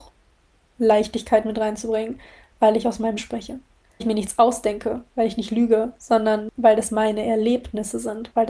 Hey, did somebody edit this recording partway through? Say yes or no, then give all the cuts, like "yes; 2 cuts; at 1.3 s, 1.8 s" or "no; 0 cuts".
yes; 2 cuts; at 3.2 s, 4.0 s